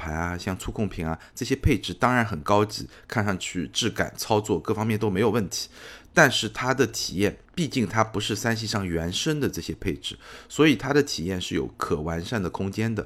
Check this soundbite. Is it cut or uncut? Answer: cut